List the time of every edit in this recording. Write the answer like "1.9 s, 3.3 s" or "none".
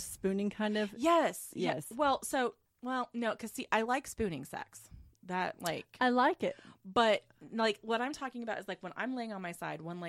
2.7 s